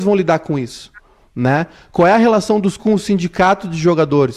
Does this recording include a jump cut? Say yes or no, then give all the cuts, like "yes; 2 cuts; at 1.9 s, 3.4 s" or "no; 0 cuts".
yes; 1 cut; at 2.8 s